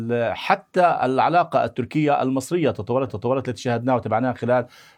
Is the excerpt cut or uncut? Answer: cut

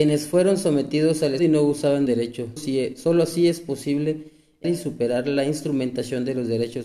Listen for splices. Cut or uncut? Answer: cut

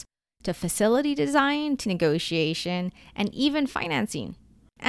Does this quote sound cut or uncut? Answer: cut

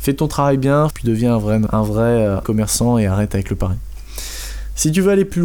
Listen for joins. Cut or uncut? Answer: cut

